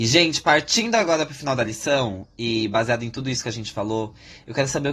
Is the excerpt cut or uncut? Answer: uncut